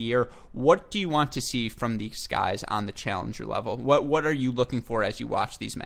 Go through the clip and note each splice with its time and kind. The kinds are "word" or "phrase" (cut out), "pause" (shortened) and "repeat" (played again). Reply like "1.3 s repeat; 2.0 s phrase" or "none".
none